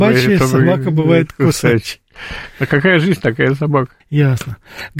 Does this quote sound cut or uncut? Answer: cut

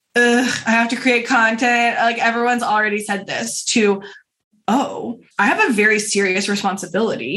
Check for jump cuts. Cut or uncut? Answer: cut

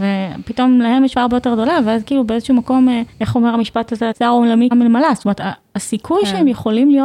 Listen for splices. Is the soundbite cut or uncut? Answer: cut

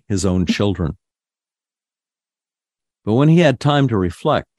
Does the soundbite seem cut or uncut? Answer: uncut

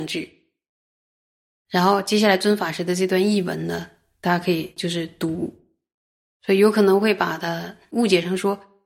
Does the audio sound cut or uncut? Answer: uncut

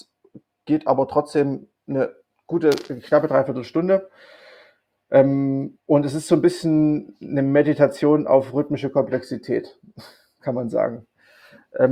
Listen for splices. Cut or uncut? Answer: cut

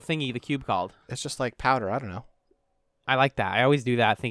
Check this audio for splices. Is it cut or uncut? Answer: uncut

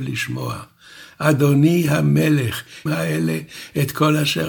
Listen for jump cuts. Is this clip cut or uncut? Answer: cut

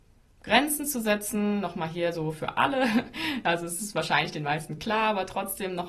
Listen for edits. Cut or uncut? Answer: uncut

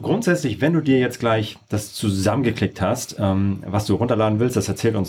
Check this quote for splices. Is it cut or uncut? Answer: uncut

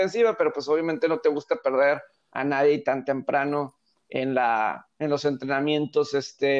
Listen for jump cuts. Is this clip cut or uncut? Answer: uncut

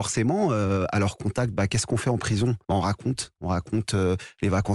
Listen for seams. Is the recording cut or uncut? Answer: cut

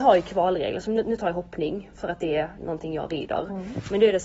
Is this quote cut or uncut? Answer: uncut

